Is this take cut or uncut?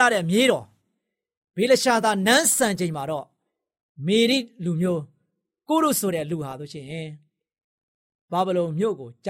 uncut